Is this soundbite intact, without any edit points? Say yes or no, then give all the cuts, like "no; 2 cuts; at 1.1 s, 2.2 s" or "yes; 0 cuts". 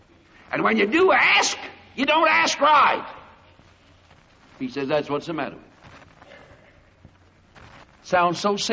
yes; 0 cuts